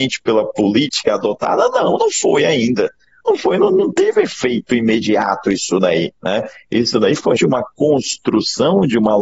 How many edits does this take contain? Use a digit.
2